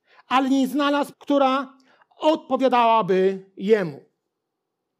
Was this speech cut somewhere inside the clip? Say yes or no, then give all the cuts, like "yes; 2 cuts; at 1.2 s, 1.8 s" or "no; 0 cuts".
yes; 1 cut; at 1.1 s